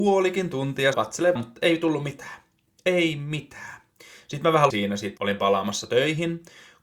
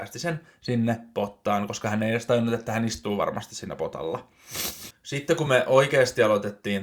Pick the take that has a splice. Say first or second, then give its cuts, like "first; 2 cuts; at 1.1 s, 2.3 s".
first; 4 cuts; at 0.9 s, 1.4 s, 4.7 s, 5.2 s